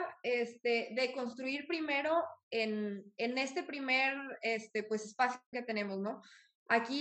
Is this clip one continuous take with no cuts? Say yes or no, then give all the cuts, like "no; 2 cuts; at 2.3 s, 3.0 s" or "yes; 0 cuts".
no; 1 cut; at 5.5 s